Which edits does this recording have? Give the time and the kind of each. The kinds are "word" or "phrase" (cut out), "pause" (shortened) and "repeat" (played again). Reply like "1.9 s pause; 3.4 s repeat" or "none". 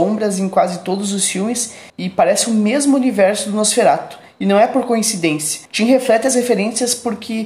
1.9 s pause; 5.7 s pause